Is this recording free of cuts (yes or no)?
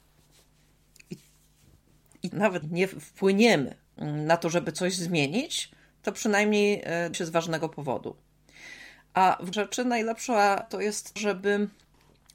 no